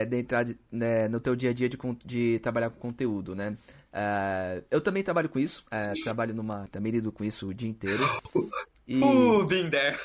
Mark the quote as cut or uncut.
cut